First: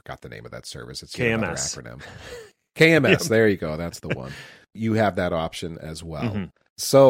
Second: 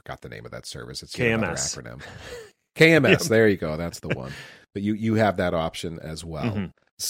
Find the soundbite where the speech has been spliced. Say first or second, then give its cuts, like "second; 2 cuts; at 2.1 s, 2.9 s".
first; 1 cut; at 4.8 s